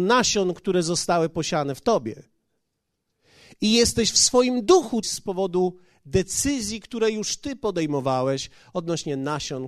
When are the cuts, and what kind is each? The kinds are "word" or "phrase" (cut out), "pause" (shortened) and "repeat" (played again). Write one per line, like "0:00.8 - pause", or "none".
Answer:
0:05.0 - phrase